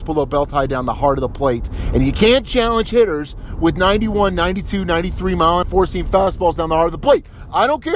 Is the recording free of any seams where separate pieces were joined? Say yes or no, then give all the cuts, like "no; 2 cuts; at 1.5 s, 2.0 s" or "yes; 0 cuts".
no; 1 cut; at 5.6 s